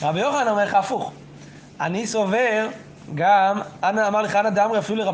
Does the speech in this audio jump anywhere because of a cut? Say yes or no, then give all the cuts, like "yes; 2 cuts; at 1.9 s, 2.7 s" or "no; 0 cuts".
no; 0 cuts